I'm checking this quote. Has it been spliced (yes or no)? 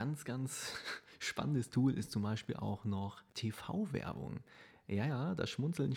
yes